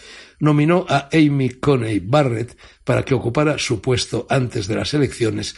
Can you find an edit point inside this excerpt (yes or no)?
no